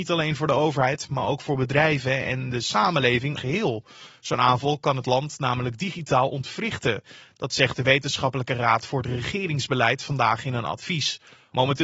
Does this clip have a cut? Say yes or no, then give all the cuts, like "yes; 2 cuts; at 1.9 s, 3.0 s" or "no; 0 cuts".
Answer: yes; 1 cut; at 3.4 s